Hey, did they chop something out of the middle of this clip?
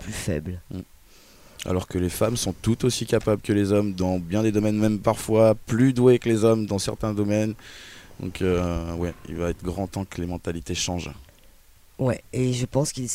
no; 0 cuts

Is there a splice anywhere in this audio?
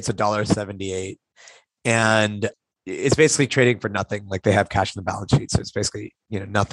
no; 0 cuts

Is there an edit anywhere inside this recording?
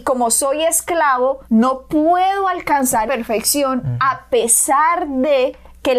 yes; 2 cuts; at 1.4 s, 3.1 s

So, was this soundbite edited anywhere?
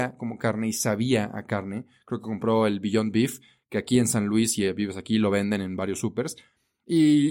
no; 0 cuts

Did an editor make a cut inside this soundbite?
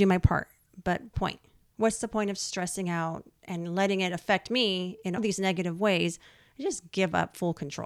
yes; 2 cuts; at 1.1 s, 5.2 s

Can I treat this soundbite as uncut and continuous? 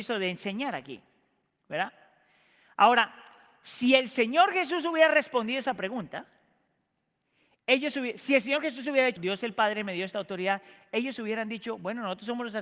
no; 1 cut; at 9.2 s

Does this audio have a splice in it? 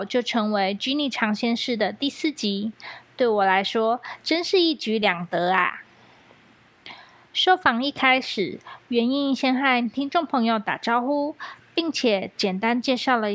no; 0 cuts

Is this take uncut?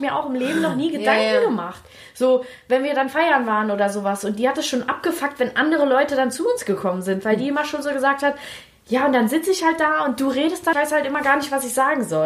no; 1 cut; at 10.7 s

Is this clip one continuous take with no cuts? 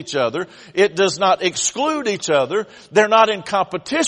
yes; 0 cuts

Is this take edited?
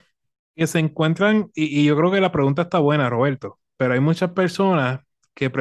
no; 0 cuts

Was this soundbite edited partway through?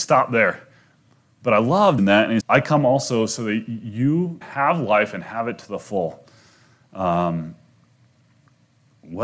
yes; 3 cuts; at 2.0 s, 2.4 s, 4.4 s

